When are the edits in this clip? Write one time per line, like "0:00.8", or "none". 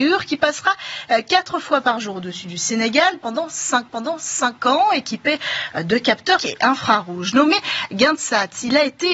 0:03.9
0:06.4